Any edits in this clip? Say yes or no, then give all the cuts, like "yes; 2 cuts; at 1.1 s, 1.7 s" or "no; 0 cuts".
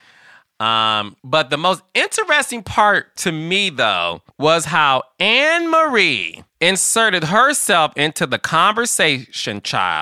yes; 3 cuts; at 1.2 s, 4.3 s, 6.5 s